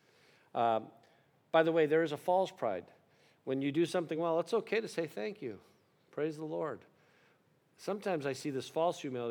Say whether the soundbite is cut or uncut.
uncut